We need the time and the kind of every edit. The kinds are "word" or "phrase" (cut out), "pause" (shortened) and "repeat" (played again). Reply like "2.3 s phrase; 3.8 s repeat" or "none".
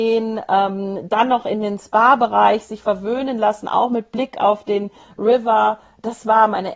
none

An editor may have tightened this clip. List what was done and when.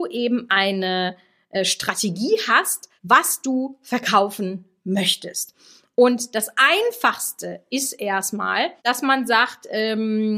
3.0 s pause; 8.8 s pause

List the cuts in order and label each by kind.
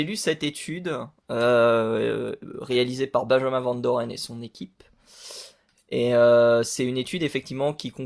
none

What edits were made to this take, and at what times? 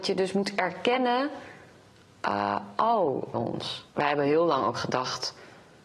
3.3 s phrase; 3.9 s pause

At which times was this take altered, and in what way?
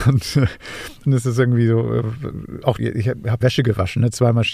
1.1 s word; 2.8 s word; 3.4 s word

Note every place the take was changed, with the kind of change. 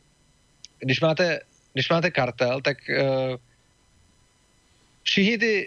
none

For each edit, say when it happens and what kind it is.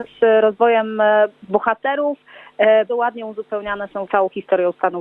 2.9 s word; 4.1 s word

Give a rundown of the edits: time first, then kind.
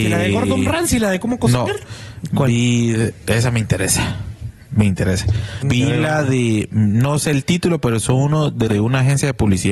5.6 s word; 8.7 s word

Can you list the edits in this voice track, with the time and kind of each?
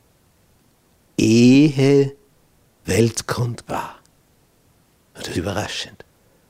2.8 s word; 3.7 s word; 5.3 s word

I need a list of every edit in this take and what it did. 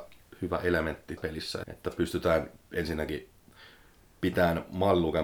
1.2 s word; 1.6 s word

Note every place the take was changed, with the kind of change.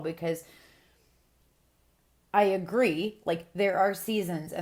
none

